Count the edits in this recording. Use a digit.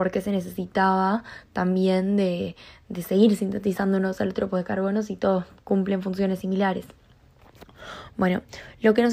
0